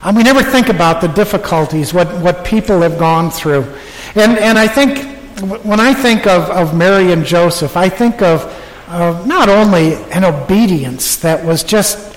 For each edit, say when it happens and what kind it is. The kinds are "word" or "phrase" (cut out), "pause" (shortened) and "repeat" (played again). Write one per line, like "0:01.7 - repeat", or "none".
none